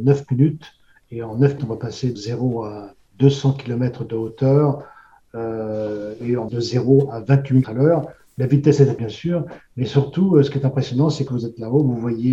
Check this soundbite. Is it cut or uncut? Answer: cut